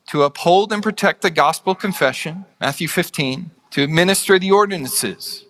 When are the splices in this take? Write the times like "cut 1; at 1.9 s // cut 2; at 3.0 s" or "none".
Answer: cut 1; at 2.5 s // cut 2; at 3.6 s